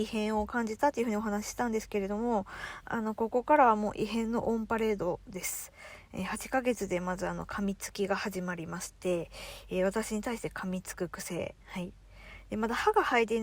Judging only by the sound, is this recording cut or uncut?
cut